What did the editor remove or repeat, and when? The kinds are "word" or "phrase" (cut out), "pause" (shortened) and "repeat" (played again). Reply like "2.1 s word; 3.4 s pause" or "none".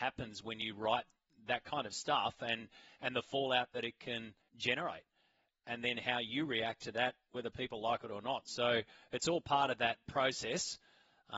4.4 s pause